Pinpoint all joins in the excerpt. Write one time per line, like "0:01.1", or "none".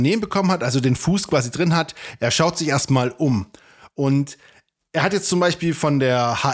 none